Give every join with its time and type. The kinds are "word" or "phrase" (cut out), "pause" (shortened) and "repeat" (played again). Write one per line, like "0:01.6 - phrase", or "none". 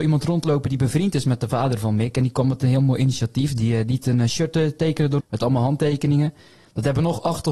0:05.2 - word